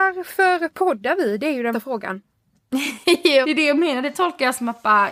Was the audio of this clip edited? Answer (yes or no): yes